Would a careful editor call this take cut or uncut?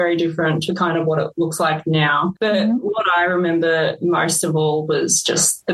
uncut